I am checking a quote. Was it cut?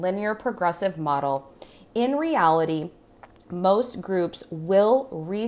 no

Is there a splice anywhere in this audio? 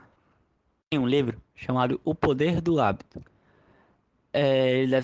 no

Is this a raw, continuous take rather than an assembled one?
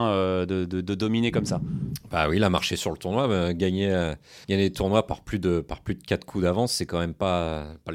no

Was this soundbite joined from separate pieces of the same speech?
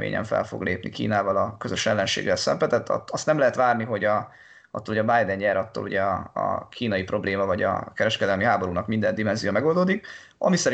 no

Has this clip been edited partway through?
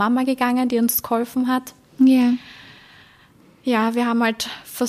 no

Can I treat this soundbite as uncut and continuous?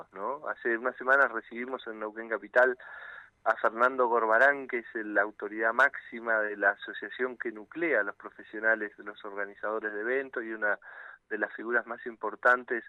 yes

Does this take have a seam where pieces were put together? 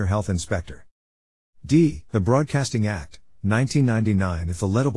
yes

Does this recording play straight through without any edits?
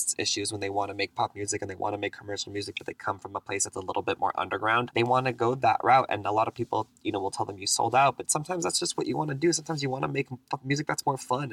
yes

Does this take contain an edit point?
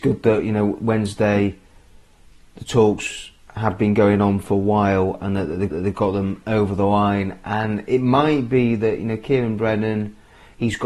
yes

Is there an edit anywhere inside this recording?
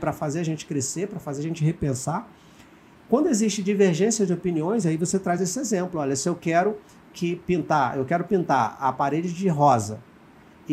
no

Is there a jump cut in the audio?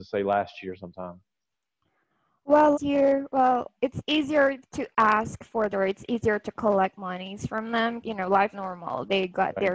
yes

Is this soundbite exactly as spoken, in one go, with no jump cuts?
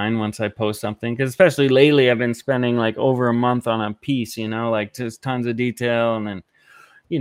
yes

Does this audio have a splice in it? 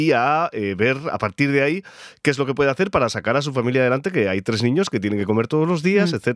no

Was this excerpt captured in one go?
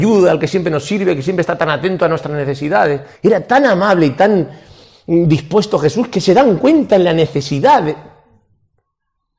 no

